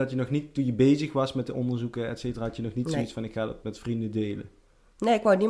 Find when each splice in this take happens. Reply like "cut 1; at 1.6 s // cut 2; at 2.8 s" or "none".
cut 1; at 3.6 s